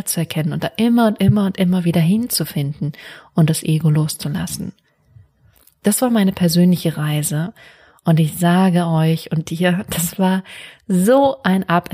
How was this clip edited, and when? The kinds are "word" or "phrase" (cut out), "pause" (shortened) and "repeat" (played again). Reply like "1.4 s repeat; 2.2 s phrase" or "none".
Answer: none

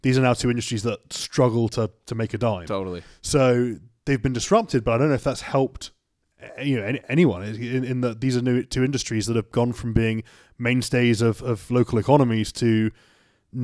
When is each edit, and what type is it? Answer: none

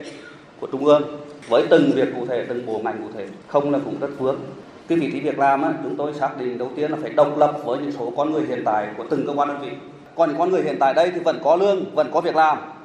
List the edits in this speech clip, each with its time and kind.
3.4 s pause; 4.8 s pause

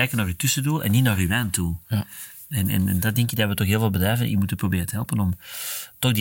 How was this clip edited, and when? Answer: none

